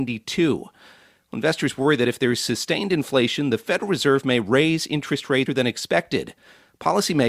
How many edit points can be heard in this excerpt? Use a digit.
1